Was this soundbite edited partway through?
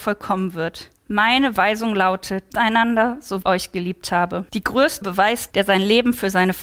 yes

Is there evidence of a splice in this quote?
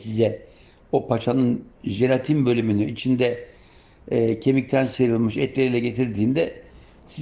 no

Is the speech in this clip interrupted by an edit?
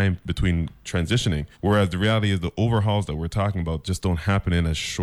yes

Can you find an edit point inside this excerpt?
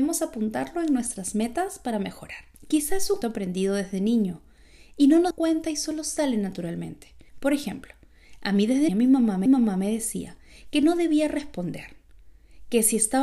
yes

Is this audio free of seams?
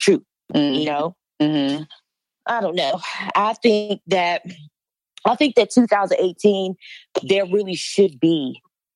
yes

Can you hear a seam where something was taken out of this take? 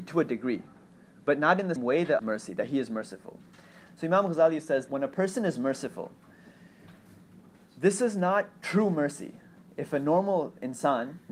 yes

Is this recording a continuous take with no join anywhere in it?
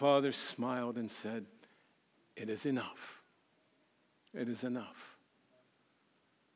yes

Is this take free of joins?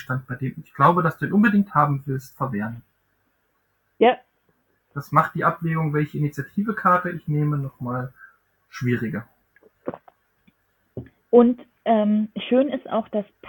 yes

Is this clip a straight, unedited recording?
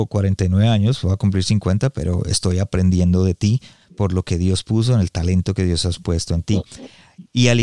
yes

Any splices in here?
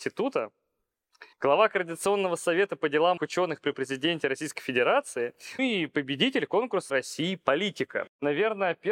yes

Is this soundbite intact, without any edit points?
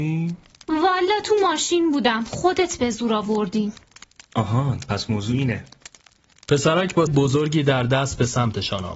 no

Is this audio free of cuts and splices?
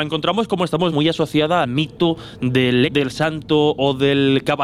no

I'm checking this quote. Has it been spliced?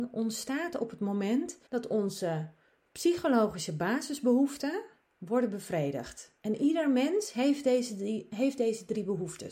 yes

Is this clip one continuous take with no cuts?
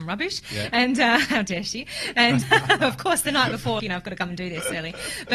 no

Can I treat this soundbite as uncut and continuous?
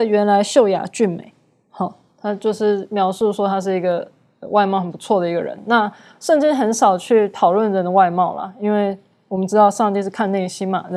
yes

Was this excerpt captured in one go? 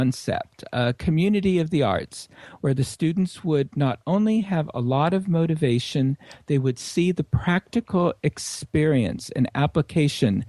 yes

